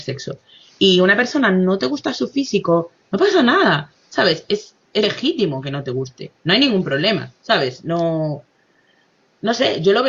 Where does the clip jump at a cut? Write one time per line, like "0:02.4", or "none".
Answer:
0:05.0
0:06.4